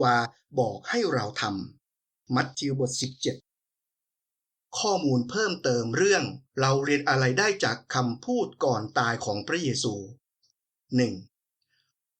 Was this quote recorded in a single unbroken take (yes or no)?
no